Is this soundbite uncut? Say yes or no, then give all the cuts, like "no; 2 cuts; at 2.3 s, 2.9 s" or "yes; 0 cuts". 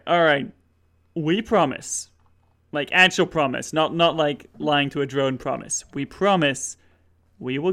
yes; 0 cuts